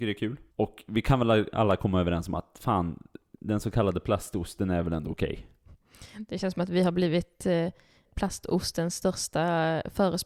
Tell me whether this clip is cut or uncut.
uncut